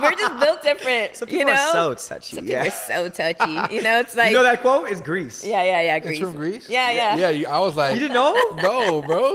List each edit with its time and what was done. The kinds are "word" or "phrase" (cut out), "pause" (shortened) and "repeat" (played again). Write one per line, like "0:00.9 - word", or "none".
none